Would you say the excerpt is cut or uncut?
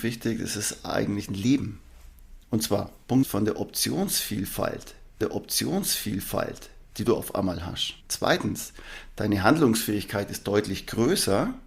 cut